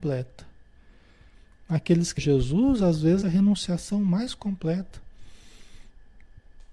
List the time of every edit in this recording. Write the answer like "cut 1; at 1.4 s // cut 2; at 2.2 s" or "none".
cut 1; at 2.2 s // cut 2; at 3.2 s